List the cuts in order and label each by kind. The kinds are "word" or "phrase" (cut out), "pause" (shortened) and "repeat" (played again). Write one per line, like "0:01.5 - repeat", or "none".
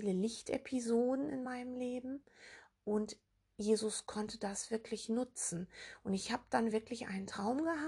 none